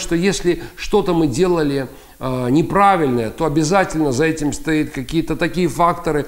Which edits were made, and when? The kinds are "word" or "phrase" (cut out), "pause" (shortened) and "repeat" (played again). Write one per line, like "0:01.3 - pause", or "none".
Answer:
none